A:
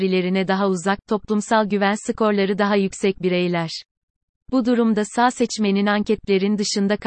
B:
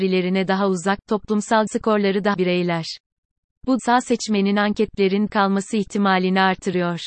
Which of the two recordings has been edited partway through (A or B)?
B